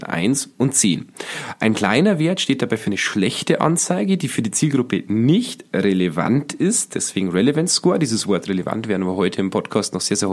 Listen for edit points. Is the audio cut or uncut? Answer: uncut